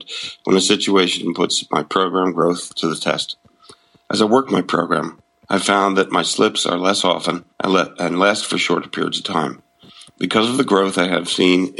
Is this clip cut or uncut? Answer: cut